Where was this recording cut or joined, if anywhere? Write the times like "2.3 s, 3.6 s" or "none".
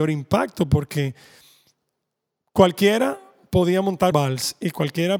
4.1 s